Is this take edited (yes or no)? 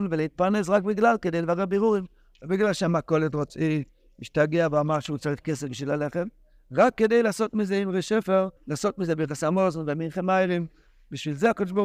yes